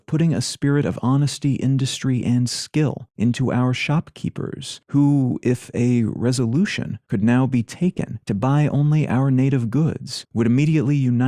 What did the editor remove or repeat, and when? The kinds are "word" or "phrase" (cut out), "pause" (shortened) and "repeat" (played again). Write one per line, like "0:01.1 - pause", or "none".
none